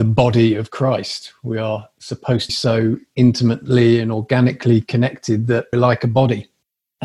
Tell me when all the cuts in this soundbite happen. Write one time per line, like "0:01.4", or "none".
0:02.5
0:05.7